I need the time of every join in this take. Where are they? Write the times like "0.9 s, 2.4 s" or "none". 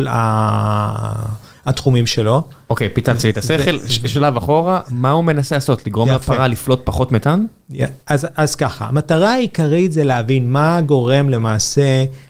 4.8 s

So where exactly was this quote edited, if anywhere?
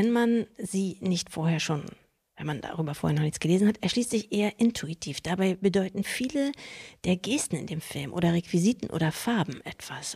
none

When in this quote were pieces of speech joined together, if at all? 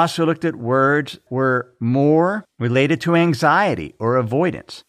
1.3 s

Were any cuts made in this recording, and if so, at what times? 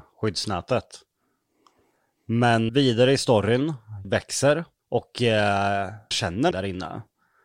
2.7 s, 4.0 s, 4.8 s, 6.1 s, 6.5 s

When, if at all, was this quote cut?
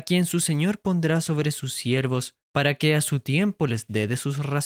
2.4 s

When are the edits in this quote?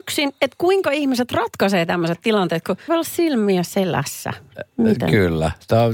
2.9 s

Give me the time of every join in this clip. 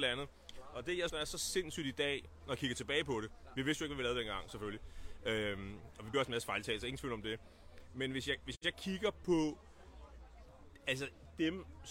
1.1 s, 6.1 s

